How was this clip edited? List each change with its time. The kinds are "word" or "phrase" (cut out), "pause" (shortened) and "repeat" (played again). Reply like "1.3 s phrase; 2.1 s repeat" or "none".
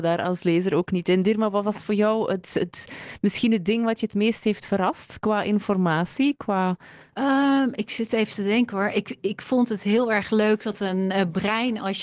none